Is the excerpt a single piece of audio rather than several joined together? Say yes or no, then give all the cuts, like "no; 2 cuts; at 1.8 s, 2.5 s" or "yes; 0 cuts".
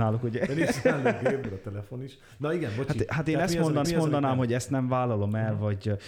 no; 2 cuts; at 1.4 s, 3.8 s